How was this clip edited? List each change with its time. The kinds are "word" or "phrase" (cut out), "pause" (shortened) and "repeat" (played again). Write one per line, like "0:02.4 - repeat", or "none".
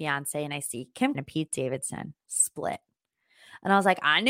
0:01.1 - word